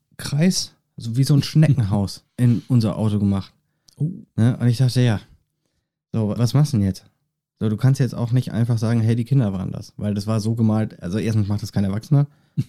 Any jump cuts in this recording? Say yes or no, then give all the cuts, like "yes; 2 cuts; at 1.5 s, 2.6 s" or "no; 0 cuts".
yes; 2 cuts; at 2.3 s, 6.4 s